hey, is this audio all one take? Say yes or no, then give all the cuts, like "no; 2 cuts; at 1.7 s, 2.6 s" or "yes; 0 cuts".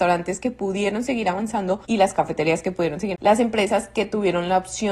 no; 2 cuts; at 1.8 s, 3.1 s